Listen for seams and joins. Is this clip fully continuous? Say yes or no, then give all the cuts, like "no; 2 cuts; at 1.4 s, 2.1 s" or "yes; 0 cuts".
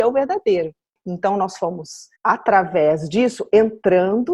no; 1 cut; at 2.1 s